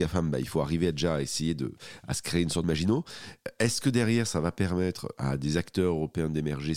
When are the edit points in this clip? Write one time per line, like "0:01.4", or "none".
0:02.6